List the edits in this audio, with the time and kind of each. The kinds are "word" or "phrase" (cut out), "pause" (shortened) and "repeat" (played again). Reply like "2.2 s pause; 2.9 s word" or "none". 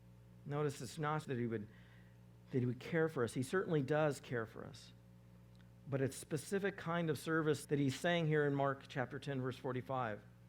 1.2 s word; 6.1 s word; 7.6 s word